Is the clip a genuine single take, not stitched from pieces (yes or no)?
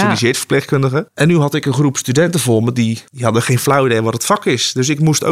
no